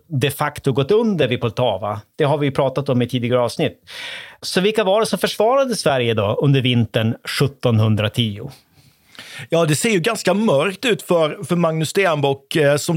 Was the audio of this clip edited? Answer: no; 0 cuts

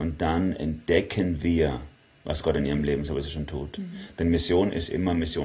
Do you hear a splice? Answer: no; 0 cuts

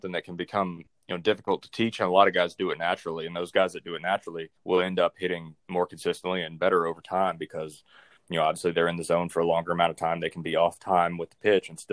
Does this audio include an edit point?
yes; 2 cuts; at 4.6 s, 5.6 s

